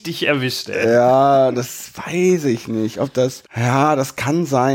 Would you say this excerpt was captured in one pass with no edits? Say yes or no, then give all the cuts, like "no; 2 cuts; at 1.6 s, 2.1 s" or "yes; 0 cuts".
no; 1 cut; at 3.5 s